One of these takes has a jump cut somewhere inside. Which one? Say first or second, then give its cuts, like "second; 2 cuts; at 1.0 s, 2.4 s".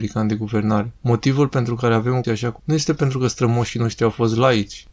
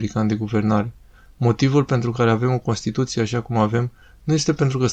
first; 3 cuts; at 1.0 s, 2.2 s, 2.6 s